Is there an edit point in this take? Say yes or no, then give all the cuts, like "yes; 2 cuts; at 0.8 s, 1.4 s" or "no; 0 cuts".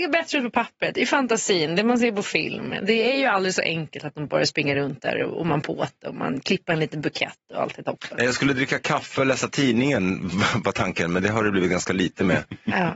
no; 0 cuts